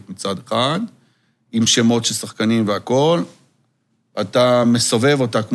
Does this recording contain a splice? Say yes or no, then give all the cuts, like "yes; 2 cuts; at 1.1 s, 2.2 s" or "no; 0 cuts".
no; 0 cuts